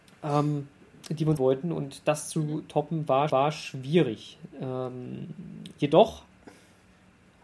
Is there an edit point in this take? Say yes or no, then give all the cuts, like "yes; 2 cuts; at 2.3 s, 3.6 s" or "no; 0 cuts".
yes; 2 cuts; at 1.4 s, 3.3 s